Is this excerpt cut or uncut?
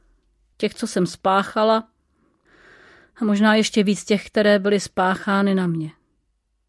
uncut